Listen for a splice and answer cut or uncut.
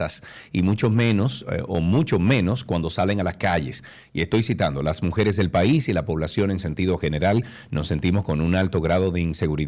uncut